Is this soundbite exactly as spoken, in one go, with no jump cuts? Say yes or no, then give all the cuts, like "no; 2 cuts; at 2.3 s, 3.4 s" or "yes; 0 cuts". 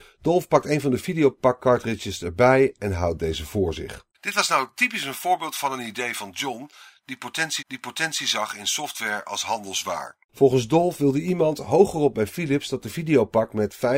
no; 3 cuts; at 4.1 s, 7.6 s, 10.2 s